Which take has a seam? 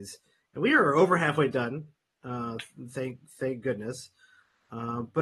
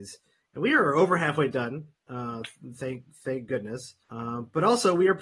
second; 2 cuts; at 2.0 s, 4.0 s

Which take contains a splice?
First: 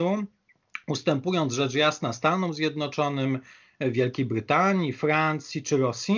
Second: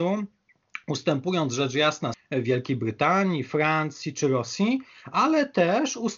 second; 1 cut; at 2.1 s

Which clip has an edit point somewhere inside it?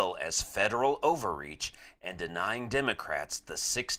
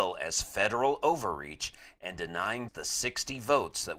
second; 1 cut; at 2.7 s

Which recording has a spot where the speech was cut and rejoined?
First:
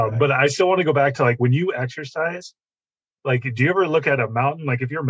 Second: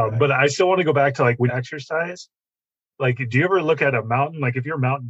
second; 1 cut; at 1.5 s

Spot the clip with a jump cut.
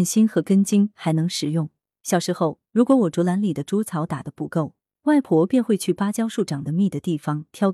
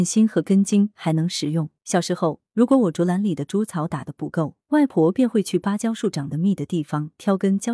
second; 2 cuts; at 1.8 s, 4.6 s

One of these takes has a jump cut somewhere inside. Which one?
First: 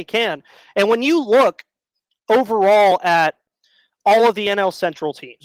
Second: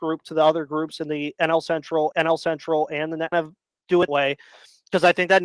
second; 3 cuts; at 2.1 s, 3.3 s, 4.1 s

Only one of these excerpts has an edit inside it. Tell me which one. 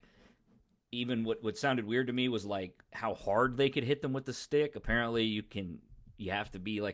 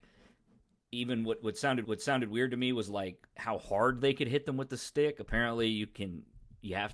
second; 1 cut; at 1.8 s

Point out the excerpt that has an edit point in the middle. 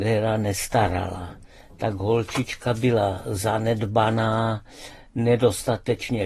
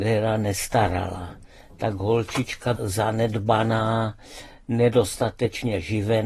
second; 1 cut; at 2.8 s

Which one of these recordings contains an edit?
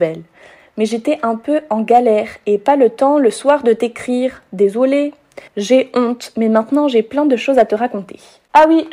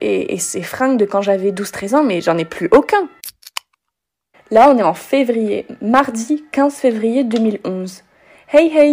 first; 1 cut; at 5.5 s

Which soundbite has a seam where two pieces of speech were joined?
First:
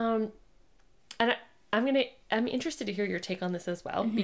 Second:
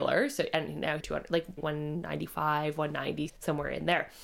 second; 3 cuts; at 1.0 s, 1.6 s, 3.3 s

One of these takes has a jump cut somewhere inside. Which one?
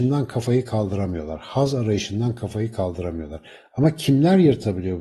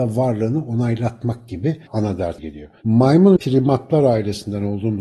second; 3 cuts; at 1.9 s, 2.4 s, 3.4 s

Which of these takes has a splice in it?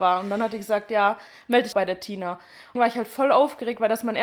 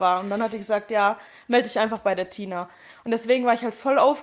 first; 2 cuts; at 1.7 s, 2.8 s

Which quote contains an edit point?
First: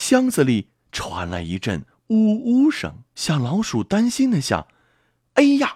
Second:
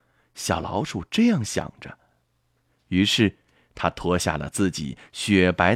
first; 1 cut; at 3.1 s

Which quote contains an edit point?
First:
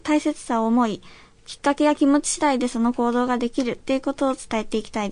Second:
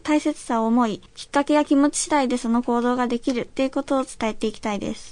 second; 1 cut; at 1.1 s

